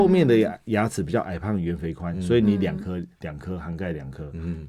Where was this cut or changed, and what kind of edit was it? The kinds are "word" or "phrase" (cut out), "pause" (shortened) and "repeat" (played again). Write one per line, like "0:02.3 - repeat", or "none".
0:03.1 - pause